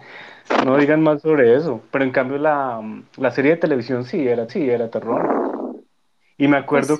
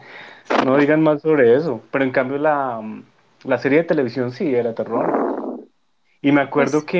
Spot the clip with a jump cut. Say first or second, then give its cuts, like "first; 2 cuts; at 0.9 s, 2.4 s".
first; 2 cuts; at 3.1 s, 4.5 s